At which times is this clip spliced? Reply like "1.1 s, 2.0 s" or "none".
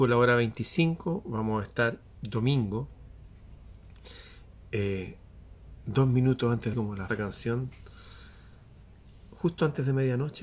2.0 s, 6.7 s, 7.1 s